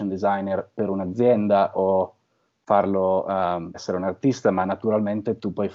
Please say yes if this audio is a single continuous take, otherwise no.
no